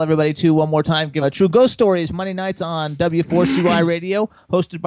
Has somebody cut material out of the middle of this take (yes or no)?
yes